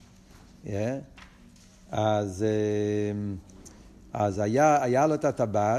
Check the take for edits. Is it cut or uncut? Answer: uncut